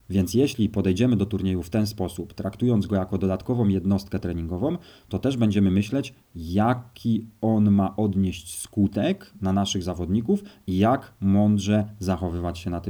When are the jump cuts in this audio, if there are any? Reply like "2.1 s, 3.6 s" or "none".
none